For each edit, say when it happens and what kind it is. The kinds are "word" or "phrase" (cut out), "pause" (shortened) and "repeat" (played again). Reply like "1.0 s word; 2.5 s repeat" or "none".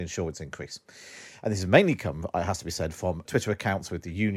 3.3 s word